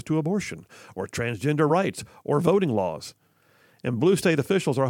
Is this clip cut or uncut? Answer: uncut